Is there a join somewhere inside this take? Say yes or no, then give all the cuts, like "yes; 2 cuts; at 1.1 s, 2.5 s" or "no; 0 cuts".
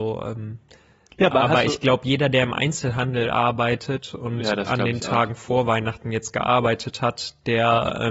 no; 0 cuts